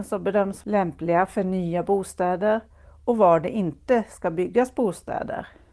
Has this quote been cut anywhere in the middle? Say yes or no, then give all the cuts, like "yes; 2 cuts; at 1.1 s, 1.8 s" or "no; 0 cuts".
no; 0 cuts